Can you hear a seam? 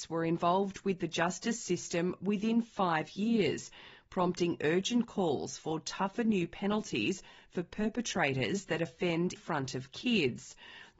yes; 1 cut; at 9.4 s

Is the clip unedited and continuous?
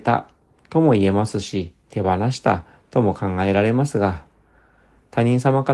yes; 0 cuts

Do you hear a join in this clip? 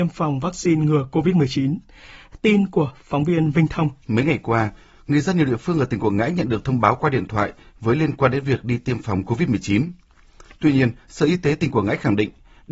yes; 1 cut; at 4.0 s

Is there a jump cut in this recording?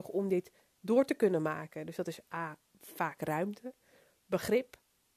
no; 0 cuts

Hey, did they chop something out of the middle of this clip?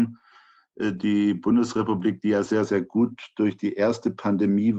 no; 0 cuts

